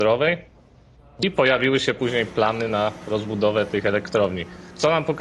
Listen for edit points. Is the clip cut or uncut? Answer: uncut